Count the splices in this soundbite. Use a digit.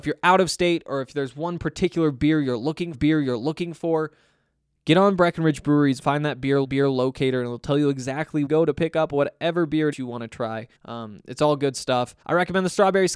7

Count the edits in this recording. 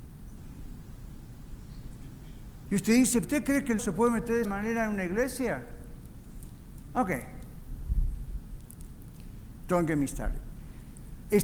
3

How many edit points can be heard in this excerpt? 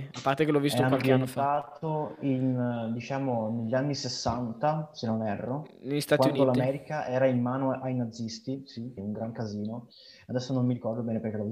1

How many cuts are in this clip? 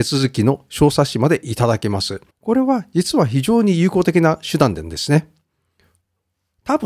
1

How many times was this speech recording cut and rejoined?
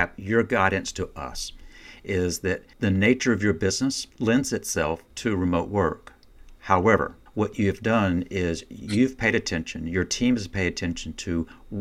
4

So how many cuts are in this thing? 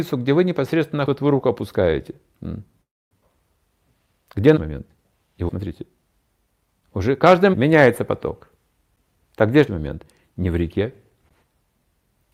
5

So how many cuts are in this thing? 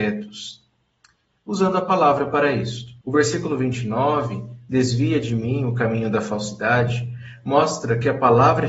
1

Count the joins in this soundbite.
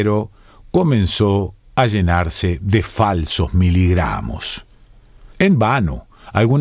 1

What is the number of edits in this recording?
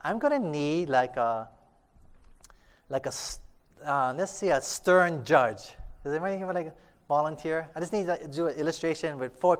0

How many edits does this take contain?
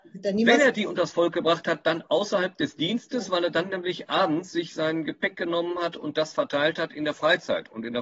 0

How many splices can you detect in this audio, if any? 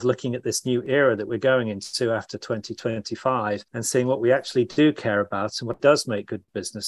2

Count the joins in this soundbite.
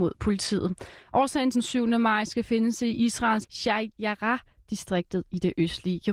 2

